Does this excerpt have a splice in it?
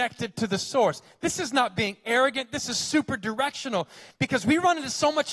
no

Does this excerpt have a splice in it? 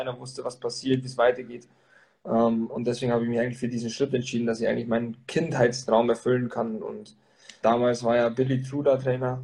yes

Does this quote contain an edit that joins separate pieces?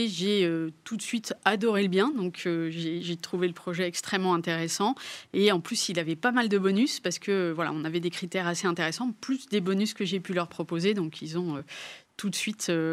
no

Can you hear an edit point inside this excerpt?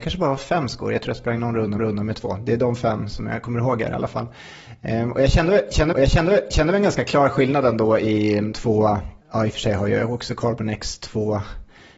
yes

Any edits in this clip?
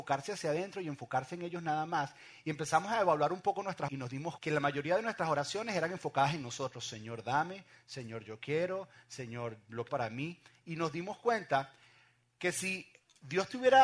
yes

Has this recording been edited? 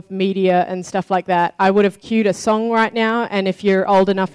no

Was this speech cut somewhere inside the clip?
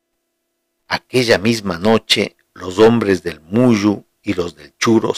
no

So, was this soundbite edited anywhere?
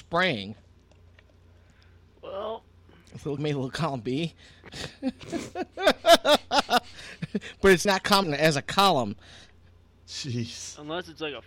yes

